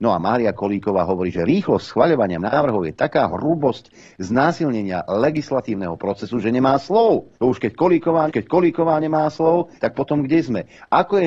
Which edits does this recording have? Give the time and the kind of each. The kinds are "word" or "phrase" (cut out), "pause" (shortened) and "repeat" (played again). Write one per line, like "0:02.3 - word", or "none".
0:02.4 - word
0:07.3 - pause
0:08.3 - repeat
0:09.8 - pause